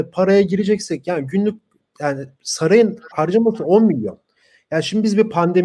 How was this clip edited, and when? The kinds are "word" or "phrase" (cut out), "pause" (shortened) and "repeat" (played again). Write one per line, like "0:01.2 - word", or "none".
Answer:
none